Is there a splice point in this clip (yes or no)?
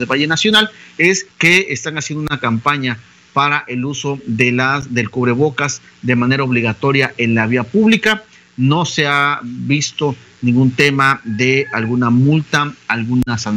yes